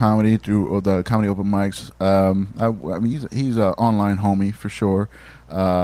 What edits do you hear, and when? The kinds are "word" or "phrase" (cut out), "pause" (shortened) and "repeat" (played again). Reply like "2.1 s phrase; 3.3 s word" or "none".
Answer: none